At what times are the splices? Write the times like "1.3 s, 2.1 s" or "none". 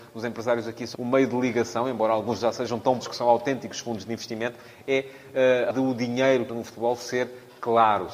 0.9 s, 2.4 s, 3.0 s, 5.7 s, 6.5 s